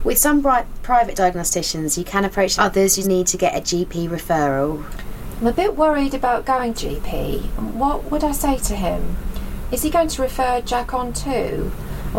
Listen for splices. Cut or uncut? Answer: cut